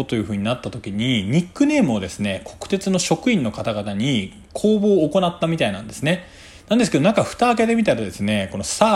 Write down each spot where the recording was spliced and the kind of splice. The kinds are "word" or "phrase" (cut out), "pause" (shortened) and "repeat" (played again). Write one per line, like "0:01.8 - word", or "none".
none